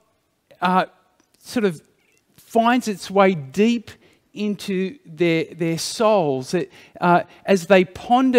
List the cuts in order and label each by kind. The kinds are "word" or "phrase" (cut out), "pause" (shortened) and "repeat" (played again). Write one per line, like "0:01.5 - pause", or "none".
none